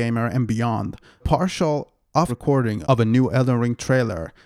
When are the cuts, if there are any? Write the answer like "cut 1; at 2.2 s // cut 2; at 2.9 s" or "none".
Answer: cut 1; at 1.2 s // cut 2; at 2.3 s